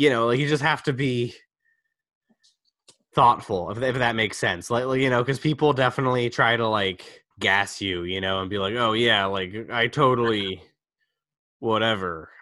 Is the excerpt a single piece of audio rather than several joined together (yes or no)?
no